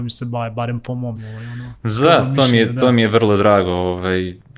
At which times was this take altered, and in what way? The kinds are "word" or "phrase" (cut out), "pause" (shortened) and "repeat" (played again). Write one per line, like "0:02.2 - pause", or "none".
0:01.2 - word